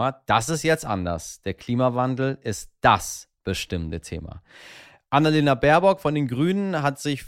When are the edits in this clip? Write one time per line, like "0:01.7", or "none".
none